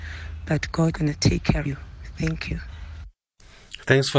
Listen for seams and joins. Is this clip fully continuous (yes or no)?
no